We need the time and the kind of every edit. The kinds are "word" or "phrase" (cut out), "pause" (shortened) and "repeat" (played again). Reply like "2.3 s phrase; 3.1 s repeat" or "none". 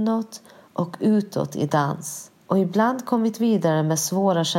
2.4 s pause